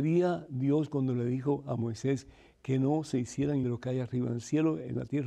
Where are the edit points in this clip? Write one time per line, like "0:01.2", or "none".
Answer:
0:03.6